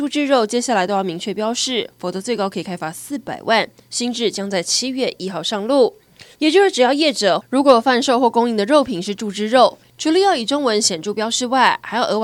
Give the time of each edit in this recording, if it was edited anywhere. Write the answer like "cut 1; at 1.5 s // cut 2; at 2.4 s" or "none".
cut 1; at 6.3 s